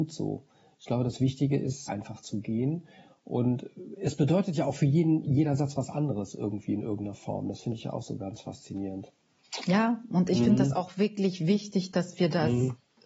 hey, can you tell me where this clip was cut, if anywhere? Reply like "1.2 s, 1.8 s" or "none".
1.9 s